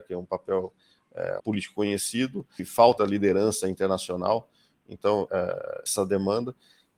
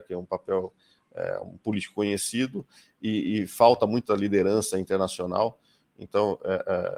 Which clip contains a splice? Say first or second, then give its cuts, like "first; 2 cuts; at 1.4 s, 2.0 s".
first; 5 cuts; at 1.4 s, 2.6 s, 3.0 s, 5.3 s, 5.9 s